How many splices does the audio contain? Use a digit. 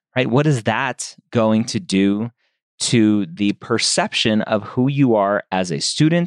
0